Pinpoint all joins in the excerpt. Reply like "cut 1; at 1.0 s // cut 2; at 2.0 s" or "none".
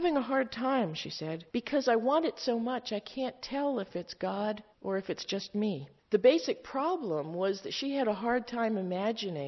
cut 1; at 1.5 s // cut 2; at 4.7 s // cut 3; at 6.0 s